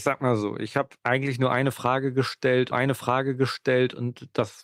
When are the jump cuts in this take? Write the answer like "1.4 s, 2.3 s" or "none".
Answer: 1.0 s, 2.7 s